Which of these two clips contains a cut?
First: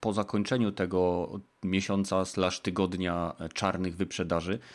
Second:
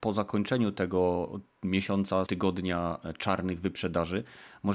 second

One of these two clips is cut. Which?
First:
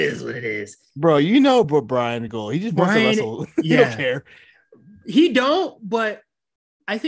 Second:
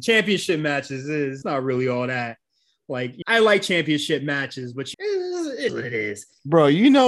second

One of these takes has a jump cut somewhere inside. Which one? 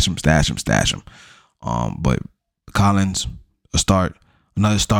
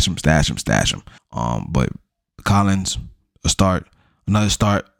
second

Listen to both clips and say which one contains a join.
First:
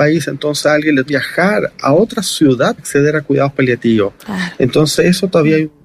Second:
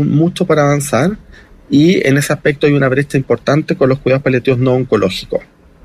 first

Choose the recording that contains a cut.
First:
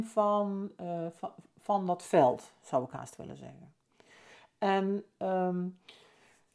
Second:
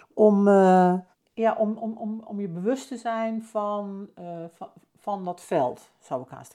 second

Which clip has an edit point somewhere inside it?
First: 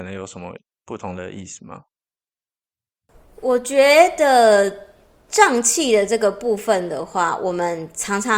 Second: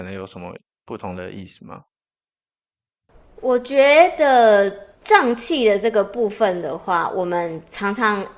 second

